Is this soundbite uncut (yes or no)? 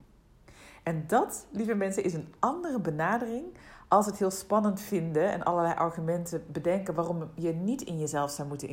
yes